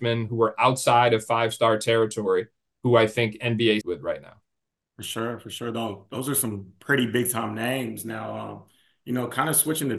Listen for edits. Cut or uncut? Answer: cut